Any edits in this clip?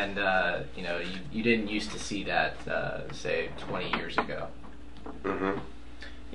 no; 0 cuts

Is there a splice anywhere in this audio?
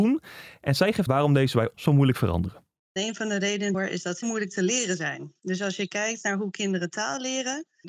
yes; 4 cuts; at 1.1 s, 1.7 s, 3.7 s, 4.2 s

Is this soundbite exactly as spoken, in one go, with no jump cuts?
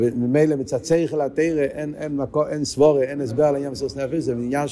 yes; 0 cuts

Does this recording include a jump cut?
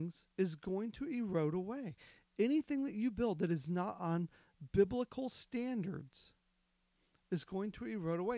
no; 0 cuts

